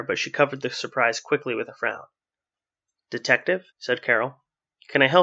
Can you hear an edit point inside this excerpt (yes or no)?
yes